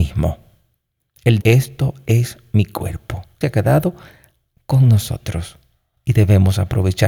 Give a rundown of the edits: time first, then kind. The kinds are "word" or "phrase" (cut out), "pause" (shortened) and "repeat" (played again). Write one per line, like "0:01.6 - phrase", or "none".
0:01.4 - word
0:03.4 - phrase